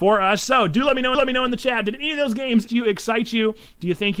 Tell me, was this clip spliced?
yes; 2 cuts; at 1.1 s, 2.7 s

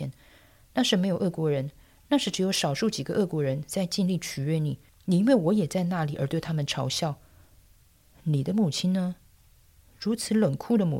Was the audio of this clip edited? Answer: yes; 1 cut; at 4.9 s

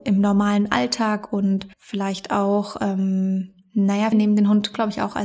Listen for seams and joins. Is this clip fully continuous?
no; 2 cuts; at 1.7 s, 4.1 s

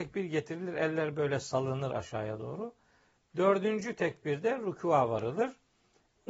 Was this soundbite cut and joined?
no; 0 cuts

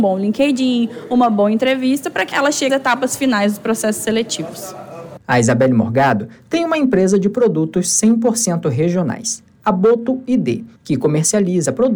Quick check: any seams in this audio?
yes; 4 cuts; at 2.3 s, 2.7 s, 5.2 s, 10.8 s

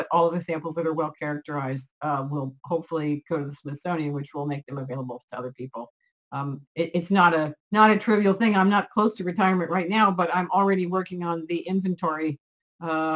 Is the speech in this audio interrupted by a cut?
yes; 2 cuts; at 6.7 s, 7.6 s

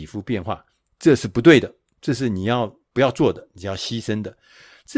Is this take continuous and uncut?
no; 1 cut; at 2.9 s

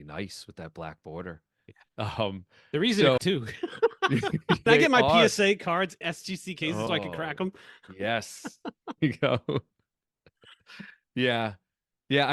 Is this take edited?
yes; 5 cuts; at 3.2 s, 4.7 s, 6.0 s, 6.9 s, 9.0 s

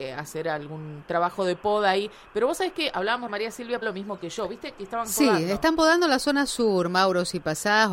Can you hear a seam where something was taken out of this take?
yes; 2 cuts; at 3.3 s, 3.8 s

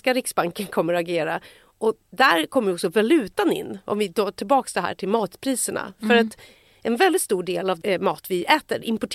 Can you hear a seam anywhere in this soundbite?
no; 0 cuts

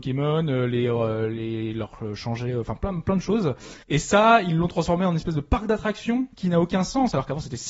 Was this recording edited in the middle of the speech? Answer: yes; 2 cuts; at 3.8 s, 6.3 s

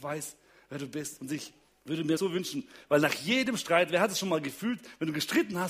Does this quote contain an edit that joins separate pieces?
yes; 2 cuts; at 1.7 s, 2.2 s

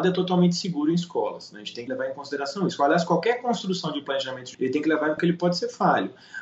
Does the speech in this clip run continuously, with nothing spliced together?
no; 3 cuts; at 1.9 s, 4.5 s, 5.2 s

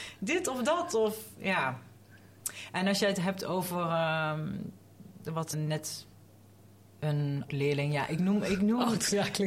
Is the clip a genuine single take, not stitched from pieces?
no; 2 cuts; at 5.5 s, 7.5 s

